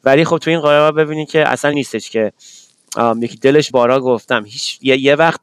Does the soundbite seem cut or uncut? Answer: cut